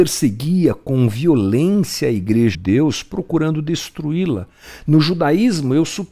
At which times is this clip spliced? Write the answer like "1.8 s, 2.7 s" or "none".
2.5 s